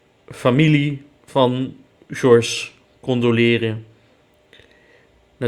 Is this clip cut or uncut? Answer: uncut